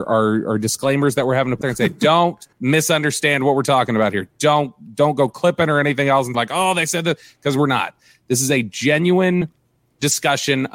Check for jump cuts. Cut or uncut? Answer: cut